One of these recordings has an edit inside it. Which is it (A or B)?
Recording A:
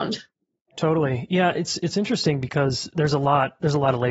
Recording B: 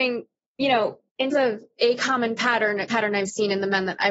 B